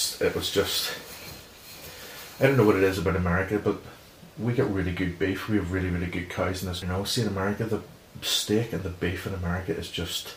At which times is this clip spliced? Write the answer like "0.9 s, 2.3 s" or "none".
6.8 s

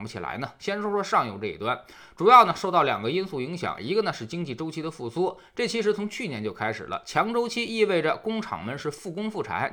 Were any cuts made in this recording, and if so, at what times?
none

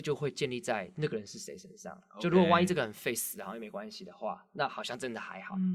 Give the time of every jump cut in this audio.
none

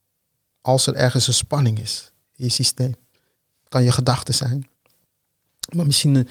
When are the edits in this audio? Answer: none

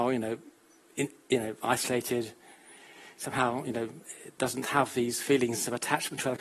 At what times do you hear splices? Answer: none

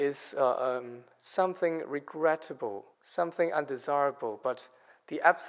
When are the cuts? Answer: 2.9 s

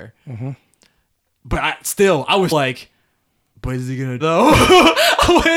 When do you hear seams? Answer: 2.5 s, 4.2 s

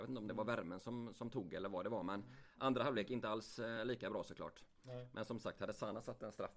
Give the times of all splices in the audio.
none

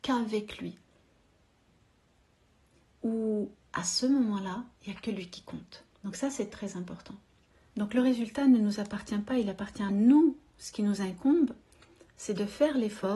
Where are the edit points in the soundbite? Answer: 4.8 s, 5.9 s, 6.5 s, 7.5 s, 9.9 s

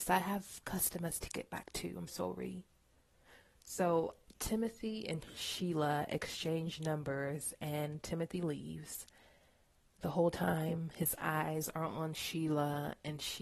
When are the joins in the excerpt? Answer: 2.1 s

